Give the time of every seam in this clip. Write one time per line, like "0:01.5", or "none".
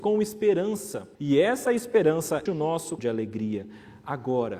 0:01.1
0:02.5
0:03.0